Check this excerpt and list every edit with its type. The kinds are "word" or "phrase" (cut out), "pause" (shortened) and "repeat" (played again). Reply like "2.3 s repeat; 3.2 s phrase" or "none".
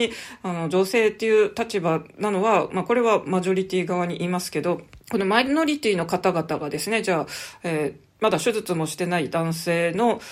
5.0 s pause